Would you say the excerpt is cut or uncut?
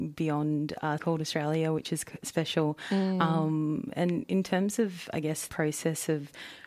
cut